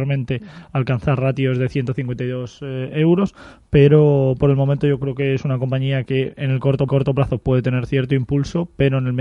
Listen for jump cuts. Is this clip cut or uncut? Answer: cut